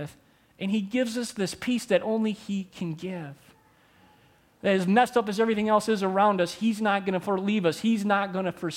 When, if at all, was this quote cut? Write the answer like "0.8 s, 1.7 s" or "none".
none

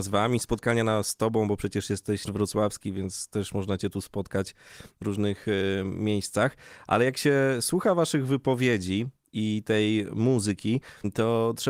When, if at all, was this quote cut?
2.3 s

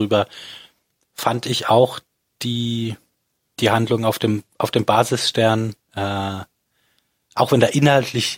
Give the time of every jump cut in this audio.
none

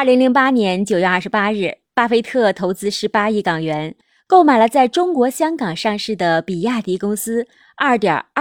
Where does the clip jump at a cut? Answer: none

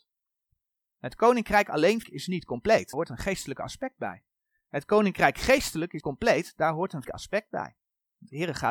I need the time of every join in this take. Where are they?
2.0 s, 2.9 s, 6.0 s, 7.0 s

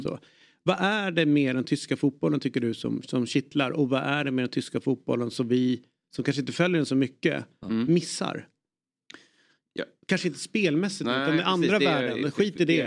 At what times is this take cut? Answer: none

